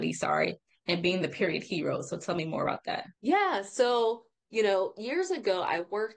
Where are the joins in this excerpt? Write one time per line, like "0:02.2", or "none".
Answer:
0:03.2

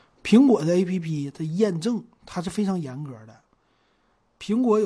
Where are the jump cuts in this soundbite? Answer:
none

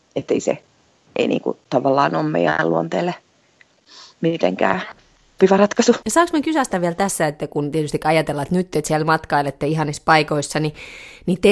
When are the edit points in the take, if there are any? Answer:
0:05.4

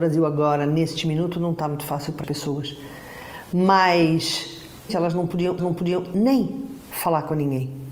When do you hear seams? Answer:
0:02.2
0:04.9
0:05.6

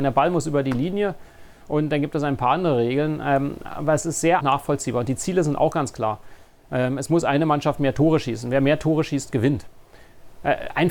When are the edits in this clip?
0:04.4

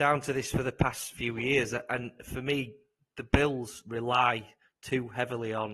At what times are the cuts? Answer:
none

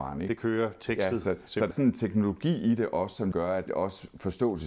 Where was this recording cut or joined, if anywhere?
0:01.7
0:03.3
0:03.7

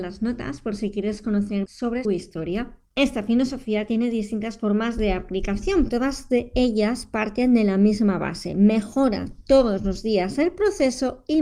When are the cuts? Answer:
0:01.7
0:02.0
0:05.9

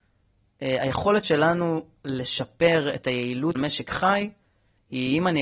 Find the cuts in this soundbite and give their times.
0:03.5

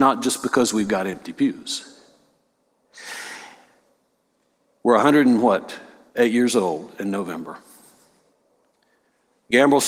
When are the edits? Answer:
none

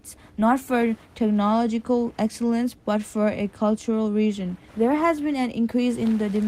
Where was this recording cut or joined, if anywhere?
0:04.7

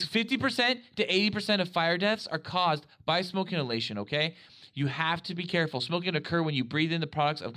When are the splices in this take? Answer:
0:06.0

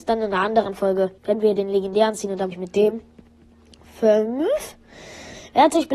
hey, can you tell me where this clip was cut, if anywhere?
0:01.2
0:02.5

